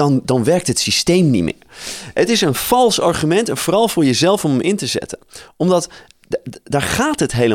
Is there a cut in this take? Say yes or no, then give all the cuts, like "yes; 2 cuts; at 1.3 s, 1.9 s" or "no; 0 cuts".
no; 0 cuts